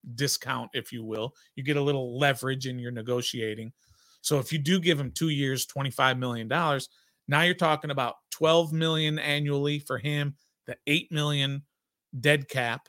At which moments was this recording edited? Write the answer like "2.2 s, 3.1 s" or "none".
none